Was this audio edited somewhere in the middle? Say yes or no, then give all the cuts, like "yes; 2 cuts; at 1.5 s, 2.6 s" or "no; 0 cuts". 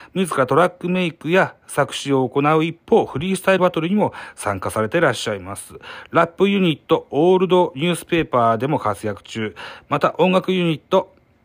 yes; 1 cut; at 3.6 s